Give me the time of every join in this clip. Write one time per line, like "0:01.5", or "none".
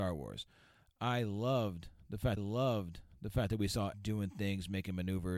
0:02.4
0:03.9